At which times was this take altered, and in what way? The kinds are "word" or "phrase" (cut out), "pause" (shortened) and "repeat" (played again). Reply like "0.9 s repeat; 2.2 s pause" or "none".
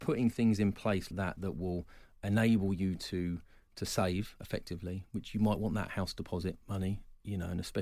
1.1 s word

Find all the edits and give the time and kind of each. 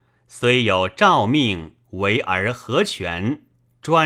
1.8 s pause

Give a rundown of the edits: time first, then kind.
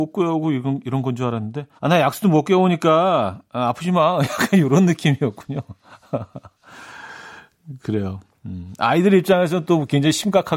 1.8 s pause

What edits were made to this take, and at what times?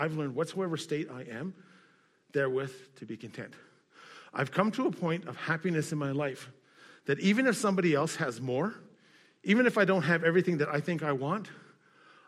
none

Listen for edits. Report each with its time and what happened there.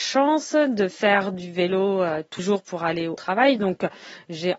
2.4 s word; 3.2 s word

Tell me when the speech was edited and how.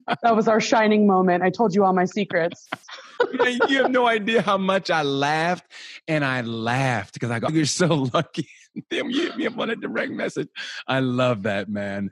2.8 s pause; 7.5 s word

